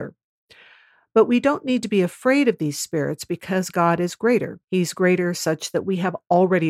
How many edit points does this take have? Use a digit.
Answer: 1